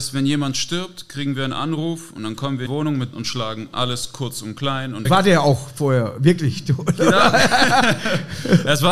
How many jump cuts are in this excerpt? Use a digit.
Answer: 3